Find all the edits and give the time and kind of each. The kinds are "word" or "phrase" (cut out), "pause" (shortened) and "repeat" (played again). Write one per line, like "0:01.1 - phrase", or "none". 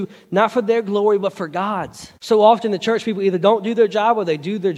0:02.2 - pause